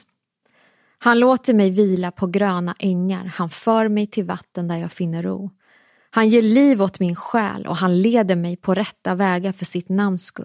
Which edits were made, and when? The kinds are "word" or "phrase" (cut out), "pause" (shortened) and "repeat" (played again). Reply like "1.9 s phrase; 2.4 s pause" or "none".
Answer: none

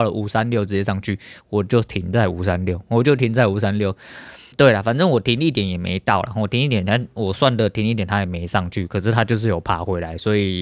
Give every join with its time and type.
4.5 s word

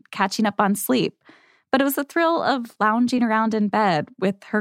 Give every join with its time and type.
none

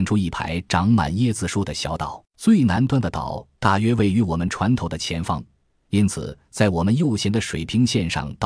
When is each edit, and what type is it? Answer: 2.3 s pause

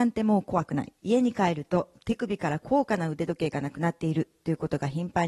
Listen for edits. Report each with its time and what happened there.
1.0 s pause

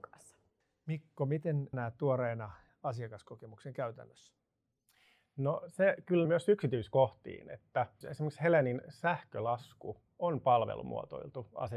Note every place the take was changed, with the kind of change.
1.7 s word; 2.7 s word; 6.2 s phrase; 8.0 s word

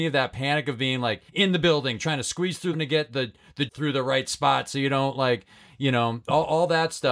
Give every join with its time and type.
1.3 s pause; 2.7 s phrase; 3.7 s word

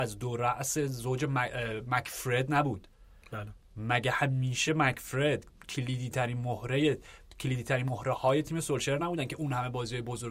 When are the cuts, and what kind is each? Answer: none

